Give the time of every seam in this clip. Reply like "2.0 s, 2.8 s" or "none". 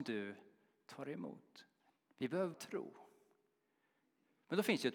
1.8 s, 2.5 s